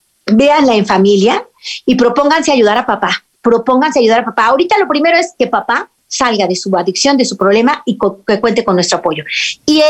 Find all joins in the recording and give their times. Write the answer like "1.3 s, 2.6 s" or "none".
3.3 s, 6.0 s